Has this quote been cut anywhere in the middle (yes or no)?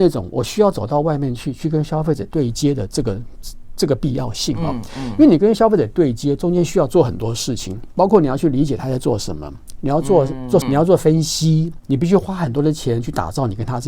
yes